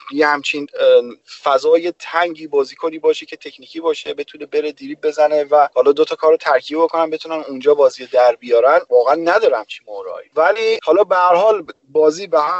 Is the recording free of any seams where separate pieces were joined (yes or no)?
yes